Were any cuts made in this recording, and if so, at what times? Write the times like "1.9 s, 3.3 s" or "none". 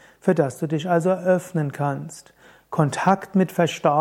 none